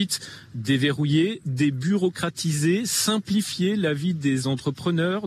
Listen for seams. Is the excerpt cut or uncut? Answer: uncut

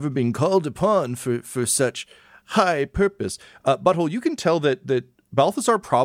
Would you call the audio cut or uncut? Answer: uncut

